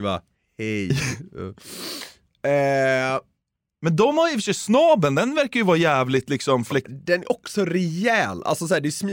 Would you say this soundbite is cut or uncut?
uncut